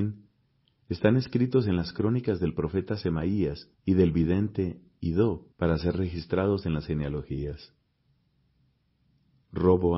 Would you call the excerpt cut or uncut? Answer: cut